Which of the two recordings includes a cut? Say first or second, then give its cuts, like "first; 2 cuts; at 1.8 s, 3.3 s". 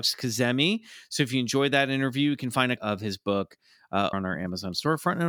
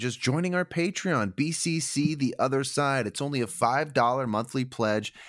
first; 2 cuts; at 2.8 s, 4.1 s